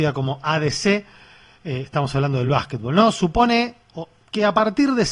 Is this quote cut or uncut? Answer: uncut